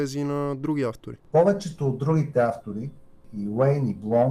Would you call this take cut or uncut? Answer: uncut